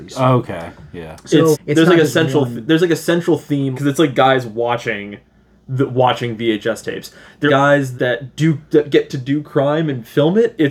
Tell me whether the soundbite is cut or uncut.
cut